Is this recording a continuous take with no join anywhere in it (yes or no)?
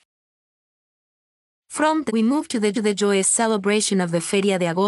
no